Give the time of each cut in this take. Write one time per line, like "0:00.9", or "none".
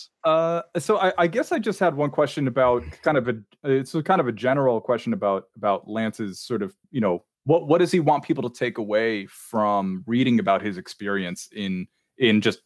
0:06.8
0:07.3